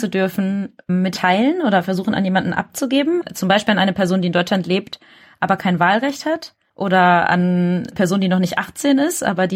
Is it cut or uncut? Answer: cut